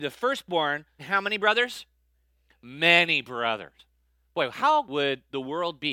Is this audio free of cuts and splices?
no; 2 cuts; at 1.0 s, 4.8 s

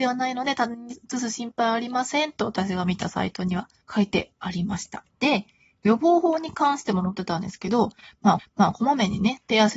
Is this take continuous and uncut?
no; 3 cuts; at 3.8 s, 5.1 s, 8.4 s

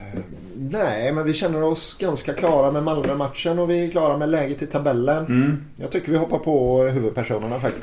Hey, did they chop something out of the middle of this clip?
no; 0 cuts

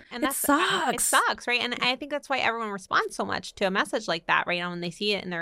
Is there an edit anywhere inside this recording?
no; 0 cuts

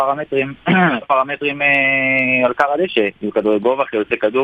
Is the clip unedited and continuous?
no; 1 cut; at 1.0 s

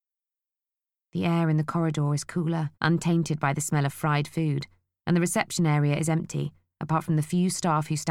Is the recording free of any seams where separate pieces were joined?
no; 1 cut; at 2.7 s

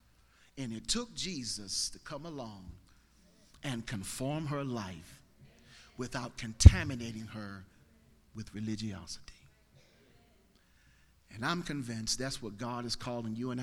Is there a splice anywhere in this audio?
no; 0 cuts

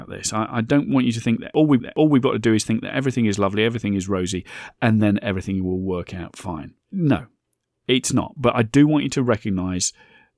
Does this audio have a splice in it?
yes; 2 cuts; at 1.8 s, 6.8 s

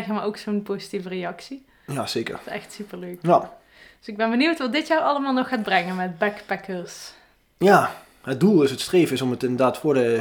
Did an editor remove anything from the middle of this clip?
no; 0 cuts

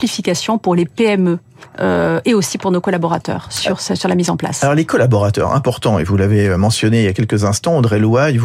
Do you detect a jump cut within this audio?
no; 0 cuts

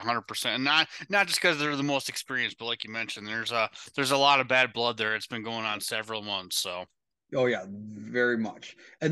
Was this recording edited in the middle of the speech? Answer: no; 0 cuts

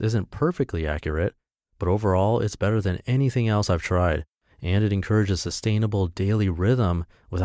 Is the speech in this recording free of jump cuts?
yes; 0 cuts

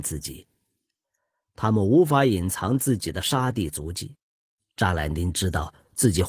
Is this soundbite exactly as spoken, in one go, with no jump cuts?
yes; 0 cuts

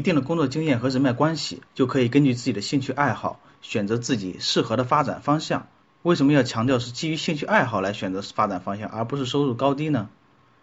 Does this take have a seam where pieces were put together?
yes; 1 cut; at 1.7 s

